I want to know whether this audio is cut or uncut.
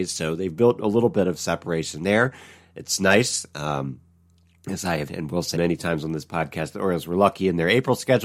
cut